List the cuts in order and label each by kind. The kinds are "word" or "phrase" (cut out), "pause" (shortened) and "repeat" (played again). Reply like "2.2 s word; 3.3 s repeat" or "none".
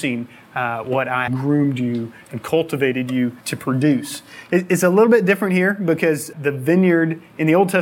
1.3 s phrase; 3.4 s pause; 6.3 s word